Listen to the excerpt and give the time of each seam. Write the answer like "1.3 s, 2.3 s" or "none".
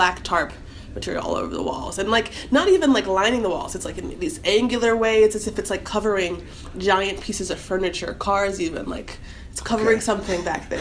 none